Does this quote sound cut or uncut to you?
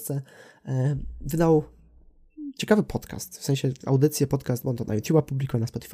uncut